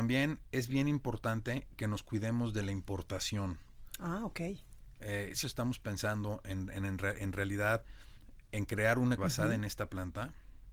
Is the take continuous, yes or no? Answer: no